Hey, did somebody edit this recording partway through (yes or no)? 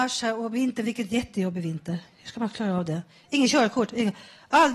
no